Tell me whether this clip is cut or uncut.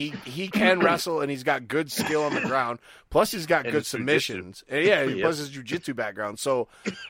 uncut